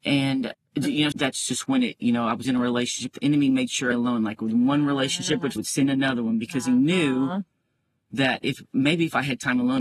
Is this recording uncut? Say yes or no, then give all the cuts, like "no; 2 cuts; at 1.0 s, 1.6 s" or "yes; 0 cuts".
no; 4 cuts; at 1.1 s, 2.4 s, 3.9 s, 5.6 s